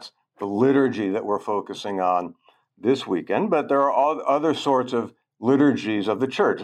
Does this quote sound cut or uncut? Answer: uncut